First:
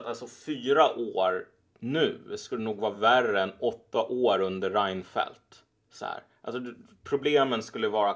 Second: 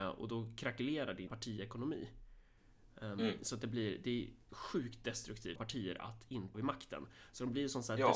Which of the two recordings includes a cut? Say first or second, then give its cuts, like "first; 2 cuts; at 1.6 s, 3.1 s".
second; 4 cuts; at 1.3 s, 4.5 s, 5.6 s, 6.5 s